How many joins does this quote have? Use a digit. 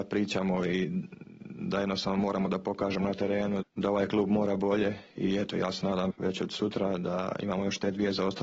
2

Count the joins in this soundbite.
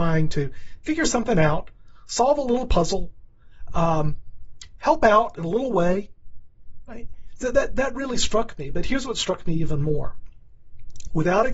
0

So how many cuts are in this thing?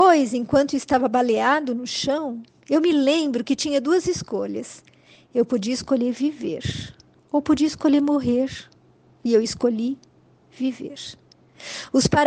0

